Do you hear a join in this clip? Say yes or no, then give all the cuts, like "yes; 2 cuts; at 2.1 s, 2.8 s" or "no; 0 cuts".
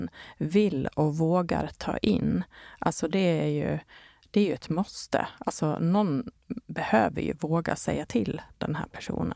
no; 0 cuts